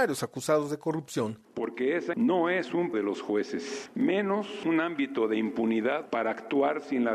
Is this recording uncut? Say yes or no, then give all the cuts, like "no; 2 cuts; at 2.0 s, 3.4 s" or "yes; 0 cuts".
no; 2 cuts; at 2.1 s, 2.9 s